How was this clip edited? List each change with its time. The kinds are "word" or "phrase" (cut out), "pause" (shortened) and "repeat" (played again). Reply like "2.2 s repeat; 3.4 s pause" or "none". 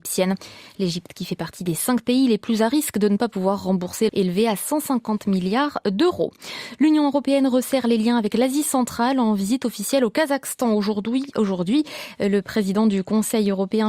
4.1 s phrase